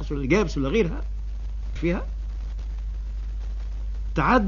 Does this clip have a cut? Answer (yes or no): yes